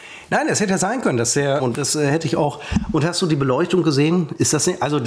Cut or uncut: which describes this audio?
cut